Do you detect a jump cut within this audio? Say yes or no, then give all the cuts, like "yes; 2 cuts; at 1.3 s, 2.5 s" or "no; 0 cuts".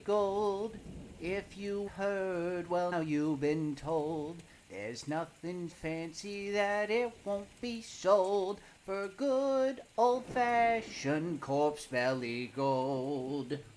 yes; 4 cuts; at 1.9 s, 2.9 s, 4.6 s, 5.7 s